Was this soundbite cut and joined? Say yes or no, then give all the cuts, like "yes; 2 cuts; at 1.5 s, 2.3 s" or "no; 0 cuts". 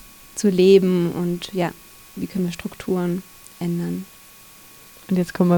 no; 0 cuts